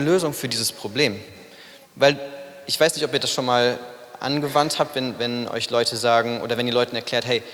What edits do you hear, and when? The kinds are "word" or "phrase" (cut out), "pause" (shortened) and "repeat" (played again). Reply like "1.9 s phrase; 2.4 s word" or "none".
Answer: 1.8 s pause